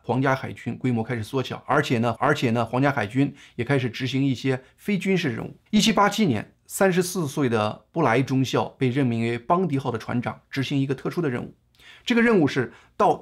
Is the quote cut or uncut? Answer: cut